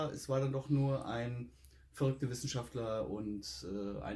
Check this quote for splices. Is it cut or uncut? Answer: uncut